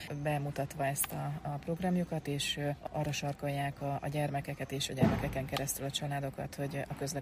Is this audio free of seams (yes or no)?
yes